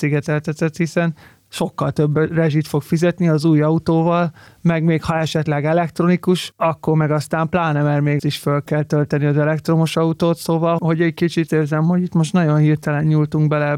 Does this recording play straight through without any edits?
no; 3 cuts; at 8.2 s, 10.8 s, 11.5 s

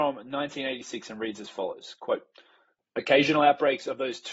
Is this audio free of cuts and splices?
yes; 0 cuts

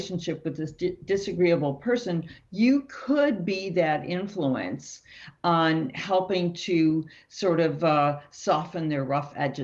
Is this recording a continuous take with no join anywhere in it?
yes; 0 cuts

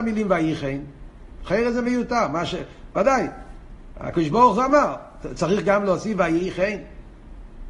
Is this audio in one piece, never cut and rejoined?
yes; 0 cuts

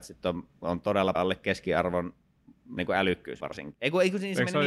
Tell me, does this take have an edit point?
yes; 3 cuts; at 1.1 s, 2.8 s, 3.4 s

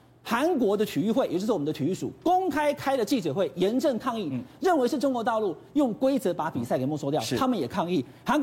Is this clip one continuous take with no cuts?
yes; 0 cuts

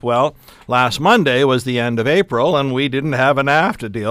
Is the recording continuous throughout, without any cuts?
yes; 0 cuts

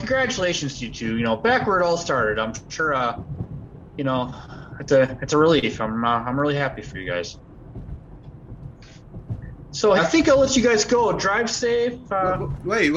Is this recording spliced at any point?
yes; 1 cut; at 10.0 s

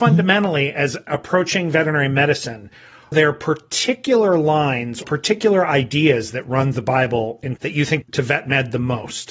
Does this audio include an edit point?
yes; 6 cuts; at 1.1 s, 3.1 s, 5.0 s, 6.7 s, 7.6 s, 8.0 s

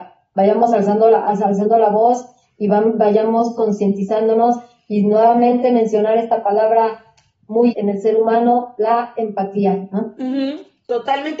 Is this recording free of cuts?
no; 1 cut; at 7.7 s

